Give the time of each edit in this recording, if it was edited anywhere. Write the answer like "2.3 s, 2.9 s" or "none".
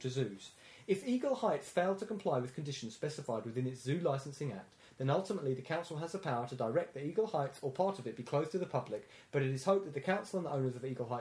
none